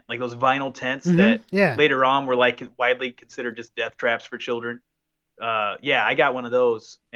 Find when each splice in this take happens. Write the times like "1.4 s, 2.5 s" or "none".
none